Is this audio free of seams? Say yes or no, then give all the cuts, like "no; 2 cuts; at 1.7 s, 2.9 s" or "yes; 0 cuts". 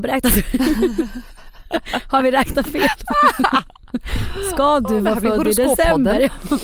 yes; 0 cuts